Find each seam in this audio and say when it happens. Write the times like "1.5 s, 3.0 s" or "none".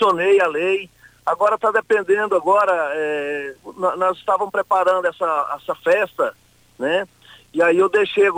none